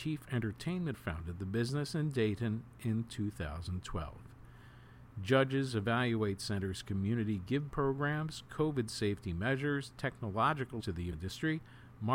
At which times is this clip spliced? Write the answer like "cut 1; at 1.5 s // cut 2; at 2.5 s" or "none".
cut 1; at 0.9 s // cut 2; at 7.7 s // cut 3; at 10.8 s // cut 4; at 11.1 s